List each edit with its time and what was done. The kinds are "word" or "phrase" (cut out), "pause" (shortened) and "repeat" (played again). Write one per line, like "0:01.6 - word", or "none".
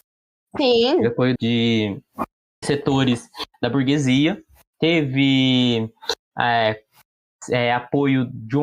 0:01.4 - phrase
0:02.6 - word